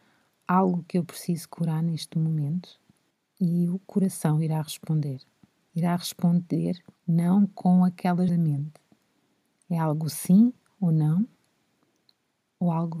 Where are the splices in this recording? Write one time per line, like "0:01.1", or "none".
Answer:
0:08.3